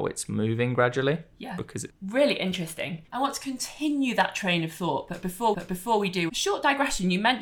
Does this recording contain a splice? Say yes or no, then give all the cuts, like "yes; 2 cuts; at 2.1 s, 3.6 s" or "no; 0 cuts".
yes; 4 cuts; at 1.9 s, 3.1 s, 5.5 s, 6.3 s